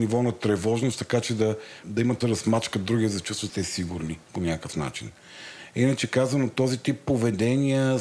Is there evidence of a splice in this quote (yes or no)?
yes